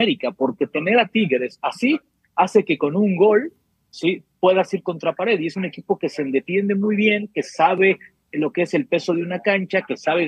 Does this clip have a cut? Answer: no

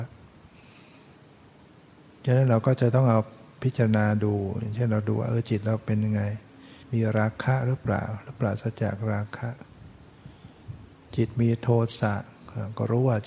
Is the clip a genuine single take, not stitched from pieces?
no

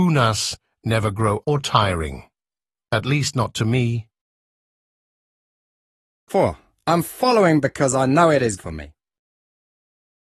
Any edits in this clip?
yes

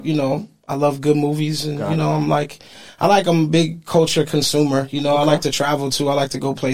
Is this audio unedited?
yes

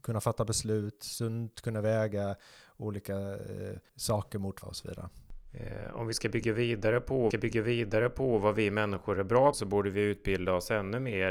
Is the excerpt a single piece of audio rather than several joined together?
no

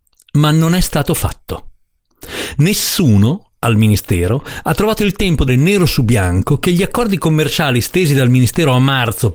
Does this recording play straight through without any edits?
no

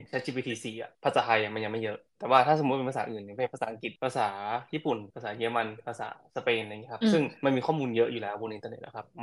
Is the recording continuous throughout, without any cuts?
no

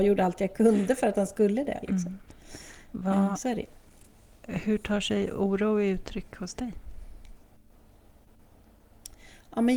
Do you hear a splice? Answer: no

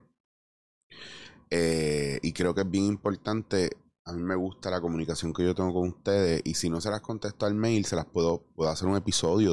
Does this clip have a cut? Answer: no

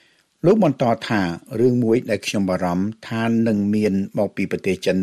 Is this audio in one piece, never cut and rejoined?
yes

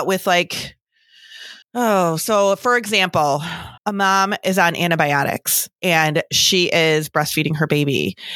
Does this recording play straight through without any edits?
no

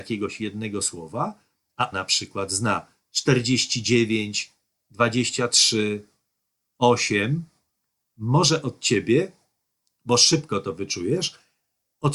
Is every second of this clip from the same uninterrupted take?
no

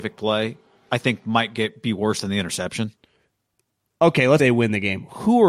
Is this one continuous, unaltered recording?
no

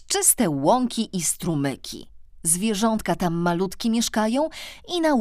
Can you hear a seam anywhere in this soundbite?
no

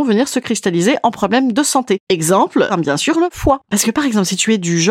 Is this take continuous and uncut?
no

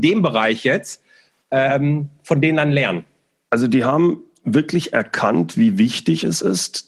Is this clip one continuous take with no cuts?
yes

